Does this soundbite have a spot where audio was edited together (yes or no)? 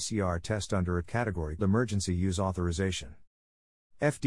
yes